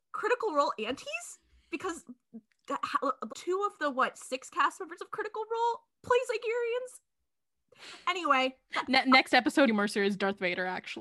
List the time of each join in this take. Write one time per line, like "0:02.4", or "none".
0:03.3
0:09.7